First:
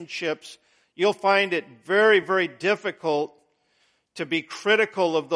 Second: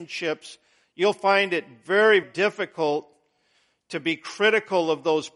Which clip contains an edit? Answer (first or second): second